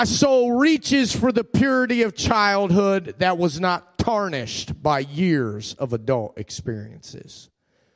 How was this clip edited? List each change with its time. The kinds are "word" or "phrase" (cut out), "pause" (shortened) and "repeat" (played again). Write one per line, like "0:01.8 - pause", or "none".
none